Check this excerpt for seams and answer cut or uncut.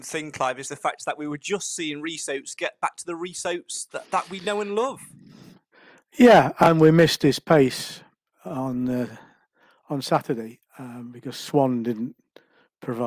uncut